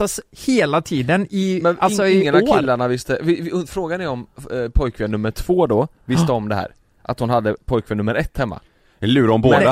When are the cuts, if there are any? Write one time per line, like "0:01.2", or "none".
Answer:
none